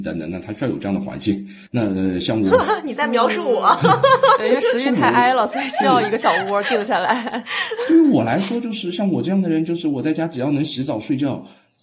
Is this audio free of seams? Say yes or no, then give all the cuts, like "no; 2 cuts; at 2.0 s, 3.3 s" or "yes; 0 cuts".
no; 1 cut; at 1.7 s